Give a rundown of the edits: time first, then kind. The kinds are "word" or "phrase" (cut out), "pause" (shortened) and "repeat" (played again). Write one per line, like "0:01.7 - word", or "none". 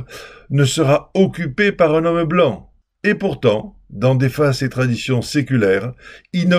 none